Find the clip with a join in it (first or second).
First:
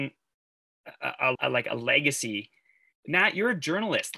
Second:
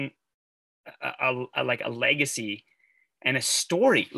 first